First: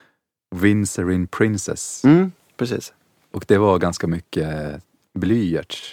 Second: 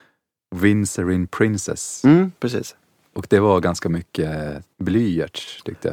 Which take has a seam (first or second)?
second